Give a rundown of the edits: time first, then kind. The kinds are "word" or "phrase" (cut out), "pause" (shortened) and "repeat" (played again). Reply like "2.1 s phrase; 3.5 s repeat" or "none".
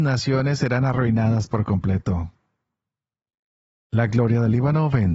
none